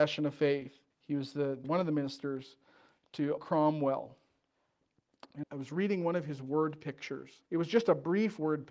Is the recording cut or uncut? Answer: cut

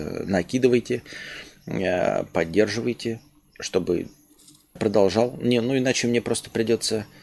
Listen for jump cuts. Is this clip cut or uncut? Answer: cut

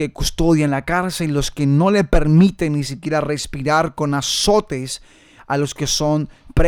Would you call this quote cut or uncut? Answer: uncut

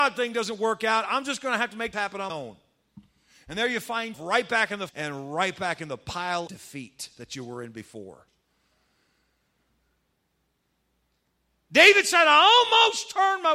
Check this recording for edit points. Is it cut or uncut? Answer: cut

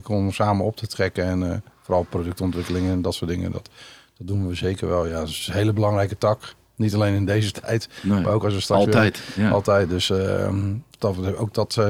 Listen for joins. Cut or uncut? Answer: uncut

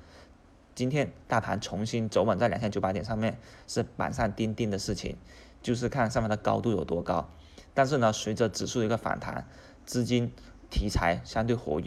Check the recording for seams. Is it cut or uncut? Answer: cut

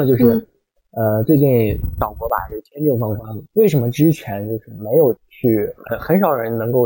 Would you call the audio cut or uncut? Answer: cut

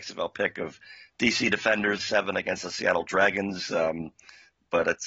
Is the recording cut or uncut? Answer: cut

